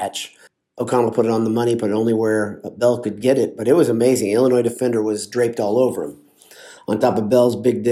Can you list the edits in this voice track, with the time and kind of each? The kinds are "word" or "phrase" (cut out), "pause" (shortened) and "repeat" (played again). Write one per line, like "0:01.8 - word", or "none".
none